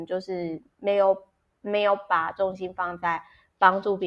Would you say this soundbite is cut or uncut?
uncut